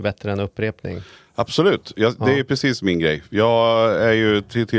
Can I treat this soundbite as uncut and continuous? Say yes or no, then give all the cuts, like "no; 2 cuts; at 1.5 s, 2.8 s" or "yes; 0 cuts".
yes; 0 cuts